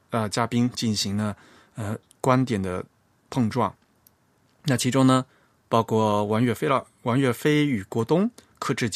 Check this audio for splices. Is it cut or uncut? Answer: cut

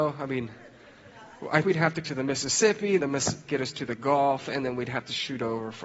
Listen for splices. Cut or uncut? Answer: cut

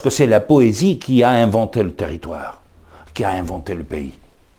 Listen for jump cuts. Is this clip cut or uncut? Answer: uncut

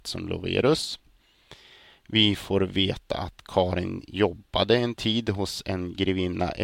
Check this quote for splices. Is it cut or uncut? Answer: uncut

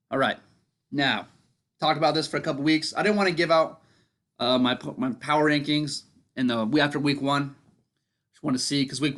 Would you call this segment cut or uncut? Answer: uncut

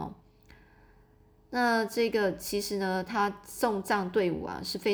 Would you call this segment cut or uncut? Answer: uncut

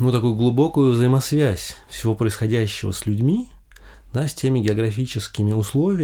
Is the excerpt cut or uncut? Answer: uncut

